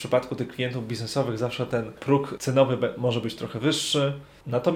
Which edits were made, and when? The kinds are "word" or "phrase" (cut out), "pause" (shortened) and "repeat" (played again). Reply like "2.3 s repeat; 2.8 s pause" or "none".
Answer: none